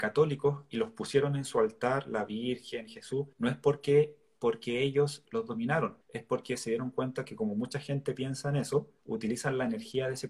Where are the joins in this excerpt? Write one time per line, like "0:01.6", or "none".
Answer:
0:03.3
0:05.2
0:06.0
0:09.0